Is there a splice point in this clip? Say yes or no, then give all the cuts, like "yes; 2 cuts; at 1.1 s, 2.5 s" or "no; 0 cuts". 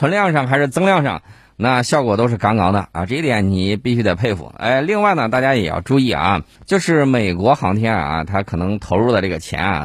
yes; 1 cut; at 6.6 s